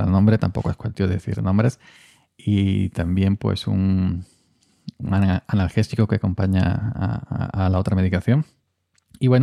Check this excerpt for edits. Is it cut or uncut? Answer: uncut